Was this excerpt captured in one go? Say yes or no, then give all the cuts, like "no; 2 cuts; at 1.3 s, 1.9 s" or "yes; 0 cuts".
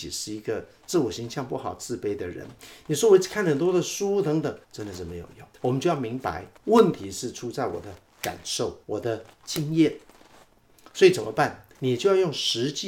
no; 6 cuts; at 4.6 s, 5.5 s, 6.6 s, 8.8 s, 9.3 s, 11.7 s